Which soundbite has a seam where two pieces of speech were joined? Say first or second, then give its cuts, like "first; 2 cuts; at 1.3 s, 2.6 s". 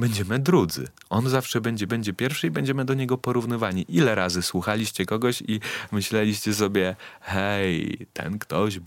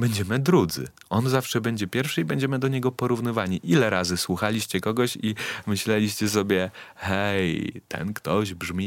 first; 1 cut; at 1.9 s